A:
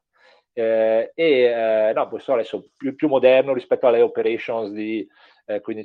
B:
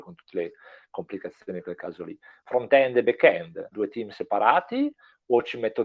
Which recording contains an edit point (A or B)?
B